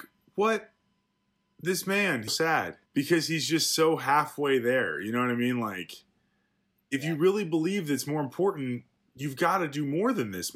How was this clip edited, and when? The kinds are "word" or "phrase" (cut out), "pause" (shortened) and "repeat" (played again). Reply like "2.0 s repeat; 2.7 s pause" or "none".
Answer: 2.3 s phrase; 2.9 s pause